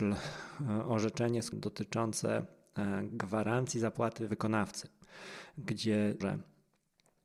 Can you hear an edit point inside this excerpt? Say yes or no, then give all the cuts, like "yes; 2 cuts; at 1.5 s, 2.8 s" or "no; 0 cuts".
yes; 3 cuts; at 1.5 s, 4.3 s, 6.2 s